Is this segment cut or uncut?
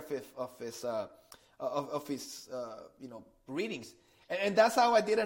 uncut